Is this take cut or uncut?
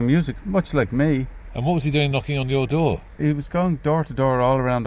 uncut